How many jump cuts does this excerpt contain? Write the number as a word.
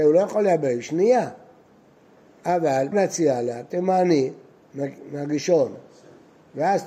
one